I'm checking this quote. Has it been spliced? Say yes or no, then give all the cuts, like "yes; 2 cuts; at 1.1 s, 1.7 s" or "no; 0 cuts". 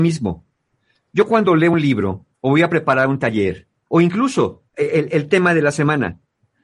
yes; 1 cut; at 4.7 s